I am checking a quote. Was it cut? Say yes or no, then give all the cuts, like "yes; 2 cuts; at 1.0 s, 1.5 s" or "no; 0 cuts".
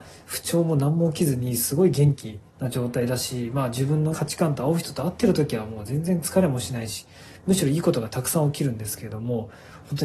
yes; 2 cuts; at 2.5 s, 4.1 s